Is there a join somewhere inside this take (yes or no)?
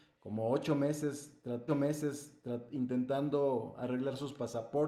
yes